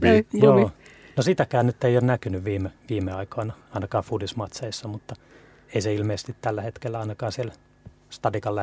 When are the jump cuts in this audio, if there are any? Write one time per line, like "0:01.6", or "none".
0:02.8